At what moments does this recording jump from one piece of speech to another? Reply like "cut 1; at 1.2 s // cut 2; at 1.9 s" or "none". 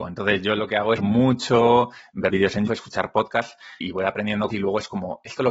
cut 1; at 1.0 s // cut 2; at 2.3 s // cut 3; at 2.7 s // cut 4; at 3.8 s // cut 5; at 4.5 s